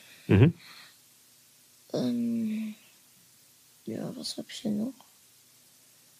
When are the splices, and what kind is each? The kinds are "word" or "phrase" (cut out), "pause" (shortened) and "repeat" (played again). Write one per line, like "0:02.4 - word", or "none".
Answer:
none